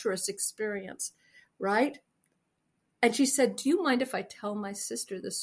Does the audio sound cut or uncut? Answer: uncut